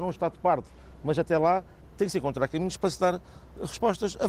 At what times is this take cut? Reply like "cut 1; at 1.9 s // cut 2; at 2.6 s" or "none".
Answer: none